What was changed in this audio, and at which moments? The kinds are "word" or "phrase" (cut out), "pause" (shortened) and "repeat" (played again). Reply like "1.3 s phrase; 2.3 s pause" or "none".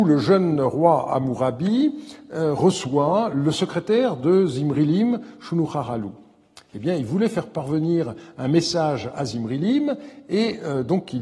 none

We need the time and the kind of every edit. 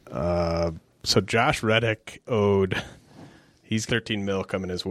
2.2 s word; 3.9 s word

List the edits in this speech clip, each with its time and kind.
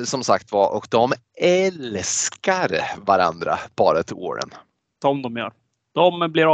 none

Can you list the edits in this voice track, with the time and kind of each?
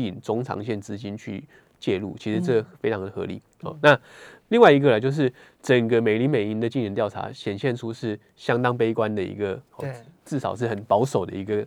none

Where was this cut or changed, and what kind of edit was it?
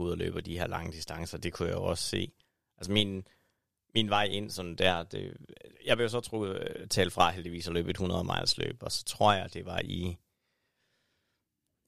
none

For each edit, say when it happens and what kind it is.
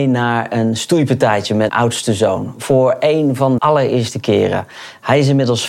1.7 s word; 3.6 s word

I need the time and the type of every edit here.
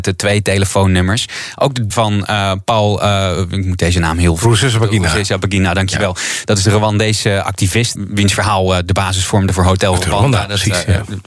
1.9 s word; 8.0 s word

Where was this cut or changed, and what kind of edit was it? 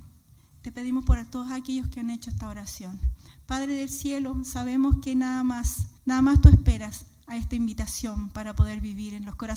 6.0 s pause

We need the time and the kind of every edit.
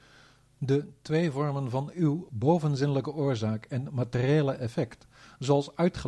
none

